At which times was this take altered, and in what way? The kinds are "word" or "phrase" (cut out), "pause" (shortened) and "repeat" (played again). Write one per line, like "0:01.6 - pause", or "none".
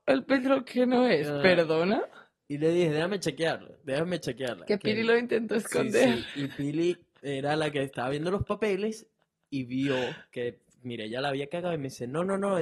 none